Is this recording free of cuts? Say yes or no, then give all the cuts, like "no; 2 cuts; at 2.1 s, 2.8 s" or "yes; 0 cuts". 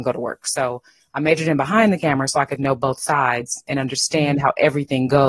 yes; 0 cuts